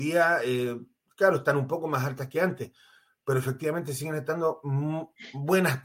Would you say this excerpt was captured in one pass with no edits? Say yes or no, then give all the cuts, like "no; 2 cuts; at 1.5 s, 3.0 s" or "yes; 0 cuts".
yes; 0 cuts